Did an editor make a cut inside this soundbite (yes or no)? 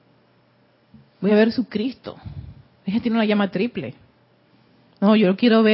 no